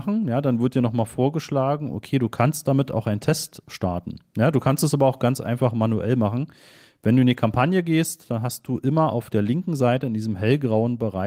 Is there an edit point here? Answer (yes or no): no